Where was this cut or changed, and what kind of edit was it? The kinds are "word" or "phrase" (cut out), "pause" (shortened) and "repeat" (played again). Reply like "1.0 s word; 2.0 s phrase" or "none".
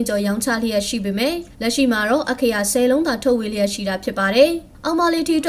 1.5 s pause